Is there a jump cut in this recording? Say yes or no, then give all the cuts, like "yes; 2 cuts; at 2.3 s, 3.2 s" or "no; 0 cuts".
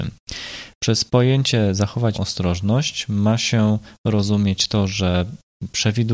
yes; 1 cut; at 2.1 s